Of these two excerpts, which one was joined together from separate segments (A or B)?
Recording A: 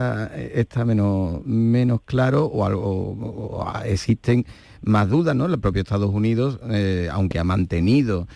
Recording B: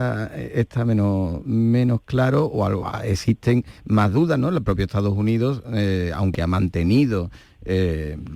B